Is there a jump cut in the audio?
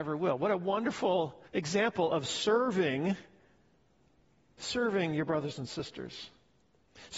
yes; 1 cut; at 1.5 s

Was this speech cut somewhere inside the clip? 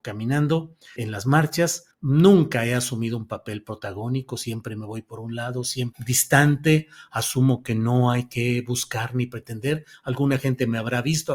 yes; 3 cuts; at 1.0 s, 1.9 s, 5.9 s

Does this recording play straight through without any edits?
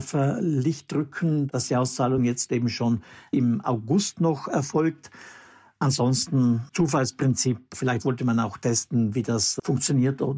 yes; 0 cuts

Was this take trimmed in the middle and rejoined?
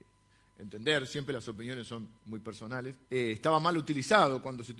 yes; 2 cuts; at 2.2 s, 3.0 s

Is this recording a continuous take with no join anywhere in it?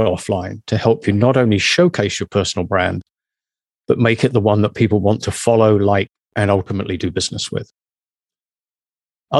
yes; 0 cuts

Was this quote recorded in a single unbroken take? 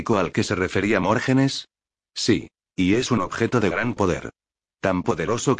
no; 1 cut; at 2.6 s

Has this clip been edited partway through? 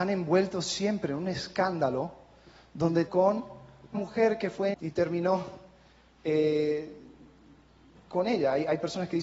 yes; 3 cuts; at 3.1 s, 3.9 s, 4.7 s

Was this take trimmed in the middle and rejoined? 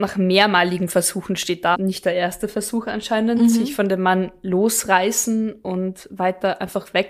yes; 1 cut; at 1.7 s

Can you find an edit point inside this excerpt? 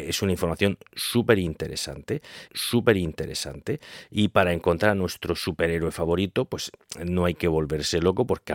yes; 1 cut; at 2.5 s

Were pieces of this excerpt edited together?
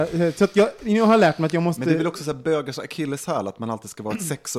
no; 0 cuts

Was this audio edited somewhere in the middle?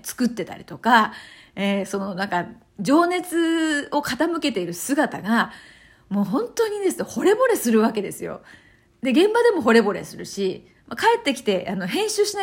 no; 0 cuts

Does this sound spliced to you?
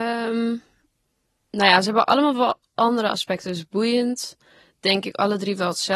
no; 0 cuts

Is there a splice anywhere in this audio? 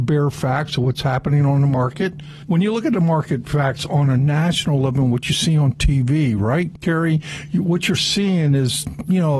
no; 0 cuts

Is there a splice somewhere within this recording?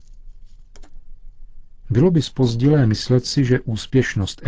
no; 0 cuts

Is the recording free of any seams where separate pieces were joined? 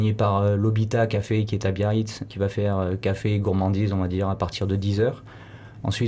no; 1 cut; at 2.3 s

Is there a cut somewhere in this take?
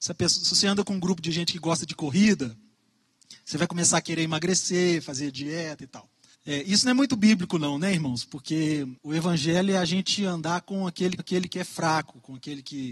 yes; 3 cuts; at 6.3 s, 9.0 s, 11.2 s

